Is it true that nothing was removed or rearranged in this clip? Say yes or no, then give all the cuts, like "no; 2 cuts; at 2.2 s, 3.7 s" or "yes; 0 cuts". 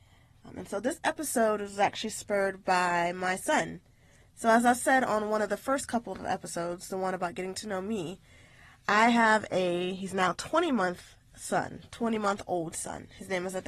yes; 0 cuts